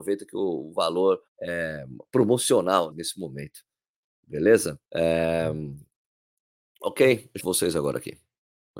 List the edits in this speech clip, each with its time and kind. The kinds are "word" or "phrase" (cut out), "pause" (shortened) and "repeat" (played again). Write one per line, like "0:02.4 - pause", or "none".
0:01.3 - pause
0:02.9 - word
0:04.8 - pause
0:07.4 - phrase